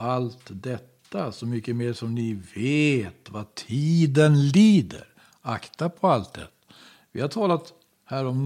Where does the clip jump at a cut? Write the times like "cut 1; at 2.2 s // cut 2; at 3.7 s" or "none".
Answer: none